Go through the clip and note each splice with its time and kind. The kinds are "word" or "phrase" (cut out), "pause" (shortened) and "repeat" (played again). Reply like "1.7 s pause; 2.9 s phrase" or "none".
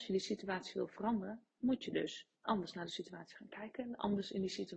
2.4 s pause